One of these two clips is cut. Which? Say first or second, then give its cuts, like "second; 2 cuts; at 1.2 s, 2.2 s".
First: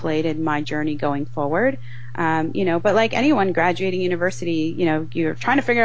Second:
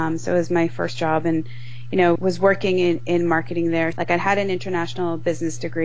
second; 2 cuts; at 2.2 s, 3.9 s